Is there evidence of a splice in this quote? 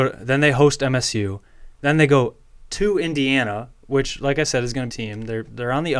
yes; 1 cut; at 4.9 s

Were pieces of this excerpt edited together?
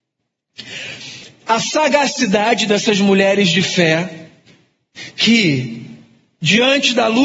no; 0 cuts

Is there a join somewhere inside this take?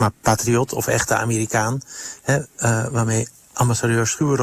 no; 0 cuts

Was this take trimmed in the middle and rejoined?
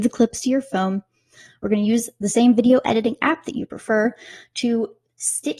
no; 0 cuts

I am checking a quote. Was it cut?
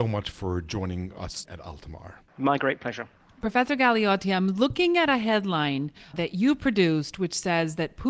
yes; 4 cuts; at 1.5 s, 2.3 s, 3.2 s, 6.1 s

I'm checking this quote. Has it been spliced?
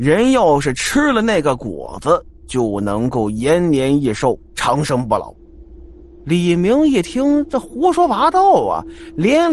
no; 0 cuts

